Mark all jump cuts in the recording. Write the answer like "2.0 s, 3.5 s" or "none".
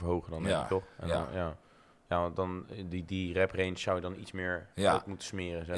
none